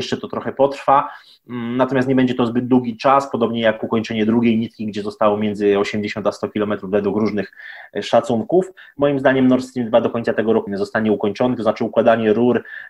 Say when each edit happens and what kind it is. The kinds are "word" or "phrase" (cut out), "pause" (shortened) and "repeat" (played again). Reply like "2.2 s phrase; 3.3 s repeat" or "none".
10.7 s word